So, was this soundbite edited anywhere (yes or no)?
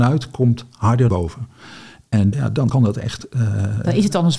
yes